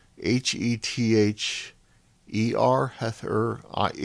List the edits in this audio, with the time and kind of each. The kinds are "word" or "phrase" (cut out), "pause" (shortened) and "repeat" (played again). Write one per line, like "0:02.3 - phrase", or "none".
none